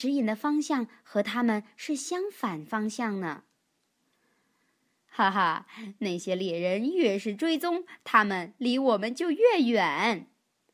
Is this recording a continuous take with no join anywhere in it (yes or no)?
yes